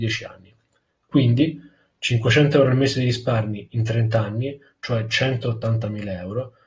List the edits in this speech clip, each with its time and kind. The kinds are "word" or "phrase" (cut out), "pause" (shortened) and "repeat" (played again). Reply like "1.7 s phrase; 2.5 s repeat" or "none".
none